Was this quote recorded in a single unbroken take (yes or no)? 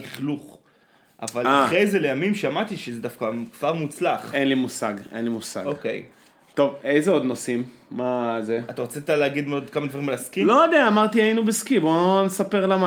yes